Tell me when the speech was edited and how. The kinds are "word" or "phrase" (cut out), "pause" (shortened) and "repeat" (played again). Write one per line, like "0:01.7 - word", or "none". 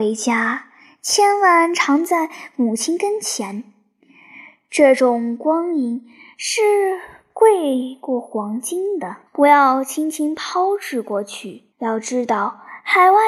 0:09.3 - pause
0:11.7 - pause